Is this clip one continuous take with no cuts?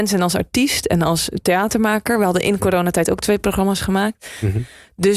yes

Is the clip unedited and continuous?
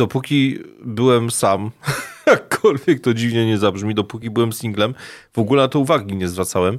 yes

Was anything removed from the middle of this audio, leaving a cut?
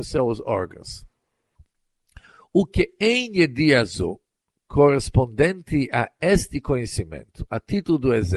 no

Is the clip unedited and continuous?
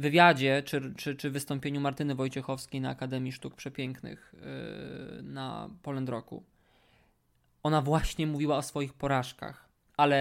yes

